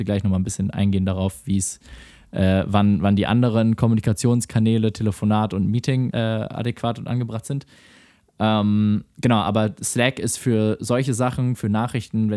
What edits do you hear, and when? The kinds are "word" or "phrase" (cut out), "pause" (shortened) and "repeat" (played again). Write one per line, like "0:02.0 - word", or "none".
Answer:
0:06.1 - word